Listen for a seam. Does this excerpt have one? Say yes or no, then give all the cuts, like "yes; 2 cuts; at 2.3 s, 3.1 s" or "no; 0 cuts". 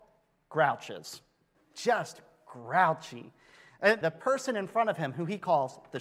yes; 2 cuts; at 1.5 s, 4.0 s